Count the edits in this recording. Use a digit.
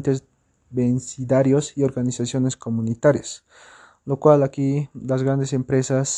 0